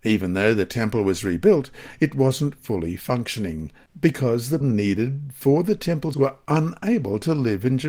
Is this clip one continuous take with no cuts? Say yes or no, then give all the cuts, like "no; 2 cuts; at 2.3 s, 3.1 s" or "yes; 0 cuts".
no; 2 cuts; at 4.6 s, 6.1 s